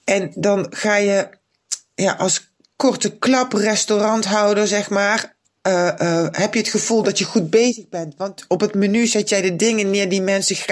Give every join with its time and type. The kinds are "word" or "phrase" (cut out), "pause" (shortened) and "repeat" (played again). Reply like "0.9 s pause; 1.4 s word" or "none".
none